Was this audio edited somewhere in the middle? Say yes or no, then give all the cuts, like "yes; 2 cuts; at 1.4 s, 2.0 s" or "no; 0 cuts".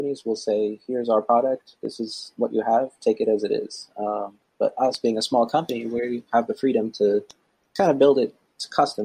no; 0 cuts